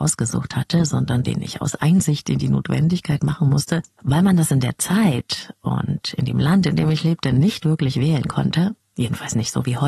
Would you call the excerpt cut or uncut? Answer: uncut